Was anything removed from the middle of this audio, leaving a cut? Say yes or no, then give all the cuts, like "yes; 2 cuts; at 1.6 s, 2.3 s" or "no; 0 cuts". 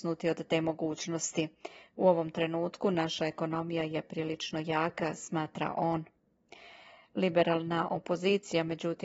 no; 0 cuts